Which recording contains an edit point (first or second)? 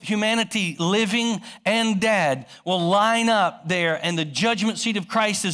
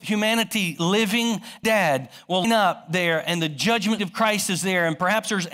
second